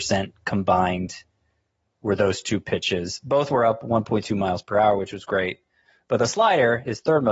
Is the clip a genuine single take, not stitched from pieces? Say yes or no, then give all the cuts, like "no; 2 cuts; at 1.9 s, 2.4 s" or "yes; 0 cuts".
yes; 0 cuts